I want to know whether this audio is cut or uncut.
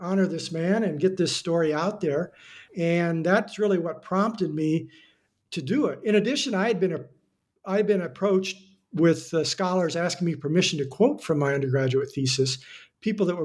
cut